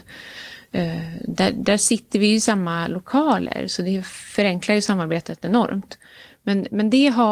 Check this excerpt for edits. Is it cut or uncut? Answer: uncut